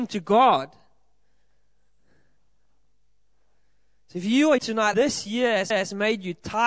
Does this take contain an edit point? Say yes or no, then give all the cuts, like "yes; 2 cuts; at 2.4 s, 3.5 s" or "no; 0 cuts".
yes; 3 cuts; at 4.6 s, 4.9 s, 5.7 s